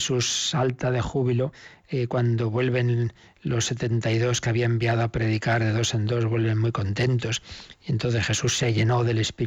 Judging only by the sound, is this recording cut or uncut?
uncut